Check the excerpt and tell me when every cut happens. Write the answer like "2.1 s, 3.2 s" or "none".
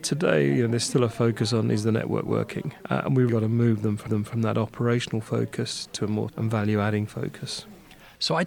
2.8 s, 3.3 s, 4.1 s, 6.3 s